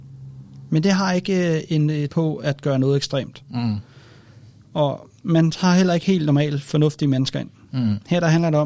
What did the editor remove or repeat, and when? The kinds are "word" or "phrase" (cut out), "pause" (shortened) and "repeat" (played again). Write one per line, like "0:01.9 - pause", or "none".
0:02.1 - word

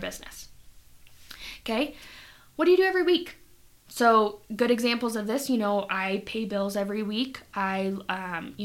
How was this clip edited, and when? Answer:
none

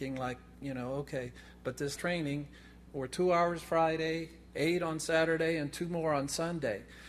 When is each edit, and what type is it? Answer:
0:02.0 - word

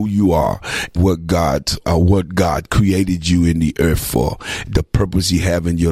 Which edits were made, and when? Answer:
0:01.0 - word
0:01.8 - word

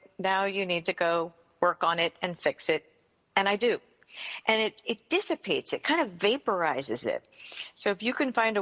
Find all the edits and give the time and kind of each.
none

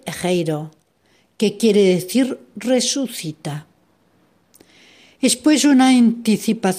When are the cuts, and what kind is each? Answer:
none

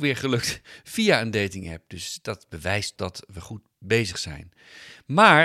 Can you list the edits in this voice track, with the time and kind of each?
0:03.0 - word

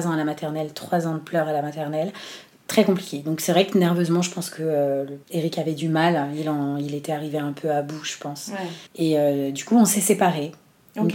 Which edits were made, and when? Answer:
0:05.2 - pause
0:08.9 - pause

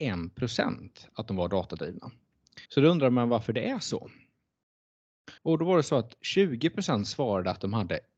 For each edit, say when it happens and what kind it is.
0:02.7 - pause
0:05.4 - pause

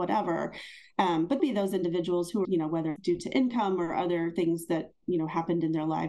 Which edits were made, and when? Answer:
0:01.4 - phrase
0:02.4 - phrase
0:03.0 - word

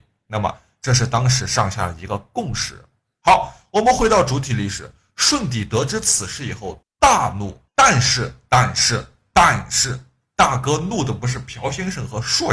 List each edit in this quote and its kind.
0:07.7 - pause

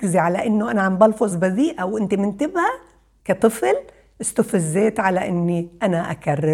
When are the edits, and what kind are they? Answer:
0:01.3 - word
0:03.2 - word

